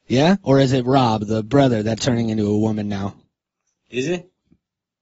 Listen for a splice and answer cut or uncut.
cut